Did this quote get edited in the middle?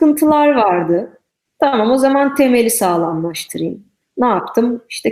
no; 0 cuts

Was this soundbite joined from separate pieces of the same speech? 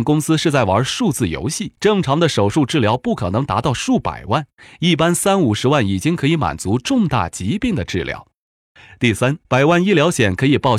yes; 2 cuts; at 1.8 s, 9.4 s

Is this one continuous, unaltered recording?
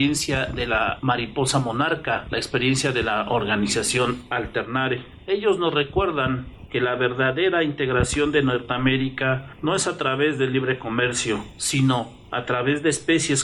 yes; 0 cuts

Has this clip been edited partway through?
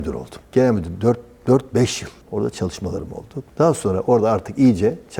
no; 0 cuts

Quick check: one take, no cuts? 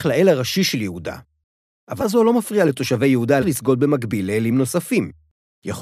no; 2 cuts; at 2.0 s, 3.4 s

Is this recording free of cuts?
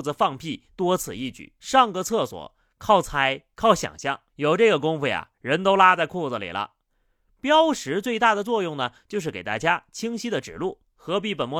no; 2 cuts; at 1.6 s, 4.3 s

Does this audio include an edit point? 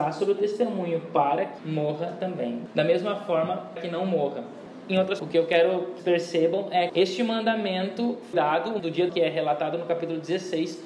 yes; 8 cuts; at 1.6 s, 3.8 s, 5.2 s, 6.0 s, 6.9 s, 8.3 s, 8.8 s, 9.1 s

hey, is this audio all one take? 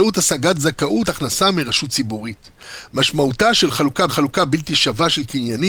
no; 2 cuts; at 1.0 s, 4.1 s

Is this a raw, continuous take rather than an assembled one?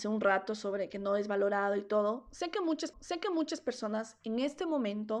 no; 1 cut; at 2.9 s

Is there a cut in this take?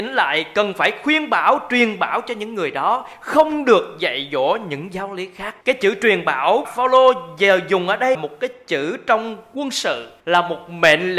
yes; 4 cuts; at 5.6 s, 6.6 s, 8.1 s, 10.2 s

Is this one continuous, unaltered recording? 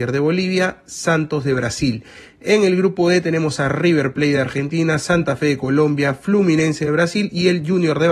yes; 0 cuts

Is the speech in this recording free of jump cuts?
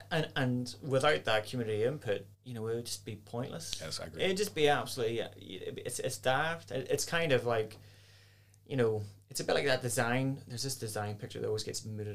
no; 1 cut; at 2.3 s

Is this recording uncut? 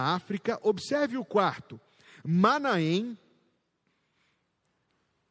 yes; 0 cuts

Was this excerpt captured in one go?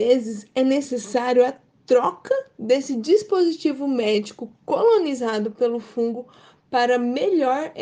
yes; 0 cuts

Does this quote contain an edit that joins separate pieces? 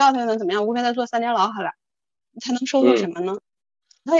no; 0 cuts

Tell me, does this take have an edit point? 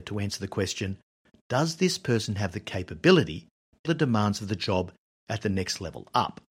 yes; 1 cut; at 3.8 s

